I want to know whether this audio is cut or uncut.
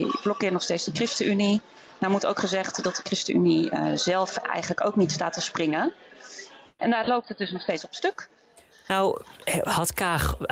uncut